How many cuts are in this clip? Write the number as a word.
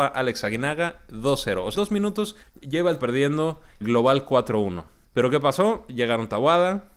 five